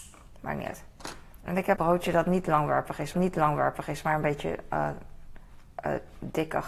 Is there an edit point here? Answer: yes; 2 cuts; at 1.8 s, 3.1 s

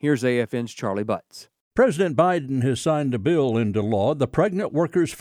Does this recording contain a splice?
no; 0 cuts

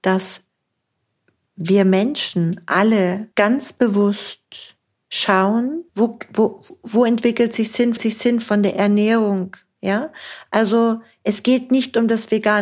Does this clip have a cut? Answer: yes; 3 cuts; at 3.3 s, 5.9 s, 8.0 s

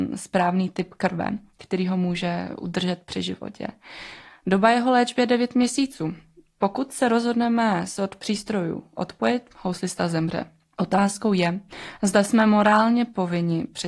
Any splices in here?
no; 0 cuts

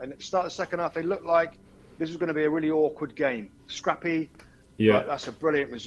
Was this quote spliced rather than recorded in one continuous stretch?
no; 0 cuts

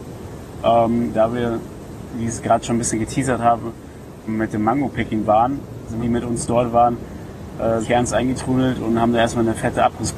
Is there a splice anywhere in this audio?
yes; 4 cuts; at 4.3 s, 5.2 s, 6.0 s, 7.8 s

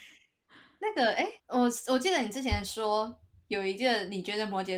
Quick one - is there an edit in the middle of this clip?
yes; 1 cut; at 1.4 s

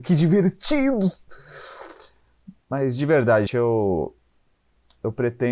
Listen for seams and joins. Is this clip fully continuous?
no; 2 cuts; at 2.6 s, 3.5 s

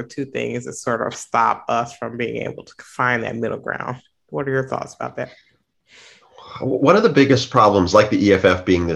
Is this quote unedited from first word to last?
yes; 0 cuts

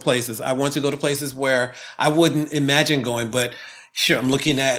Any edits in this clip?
no; 0 cuts

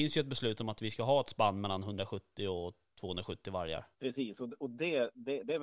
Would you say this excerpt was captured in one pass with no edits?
no; 1 cut; at 3.9 s

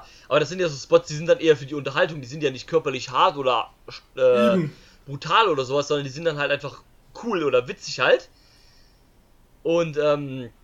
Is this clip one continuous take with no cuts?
yes; 0 cuts

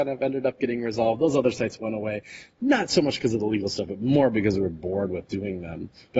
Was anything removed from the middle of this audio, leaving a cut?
no; 0 cuts

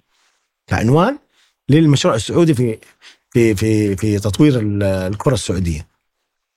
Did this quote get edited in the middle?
no; 0 cuts

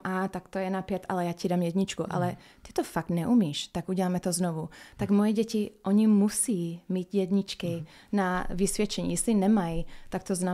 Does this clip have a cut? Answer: no; 0 cuts

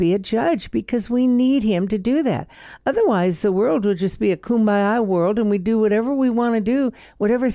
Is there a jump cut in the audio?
no; 0 cuts

